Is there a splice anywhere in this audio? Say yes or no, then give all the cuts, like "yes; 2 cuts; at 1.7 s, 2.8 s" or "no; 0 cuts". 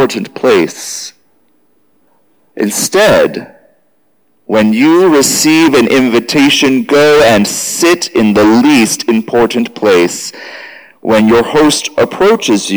no; 0 cuts